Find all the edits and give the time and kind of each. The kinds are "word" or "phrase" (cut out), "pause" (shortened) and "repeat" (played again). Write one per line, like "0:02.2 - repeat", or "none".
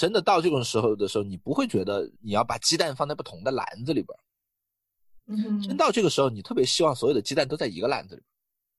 0:02.2 - pause